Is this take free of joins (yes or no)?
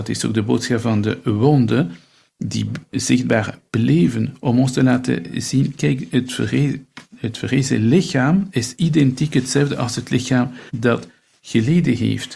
no